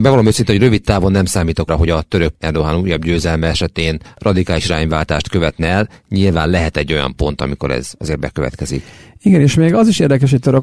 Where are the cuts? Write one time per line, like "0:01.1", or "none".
0:01.7
0:02.3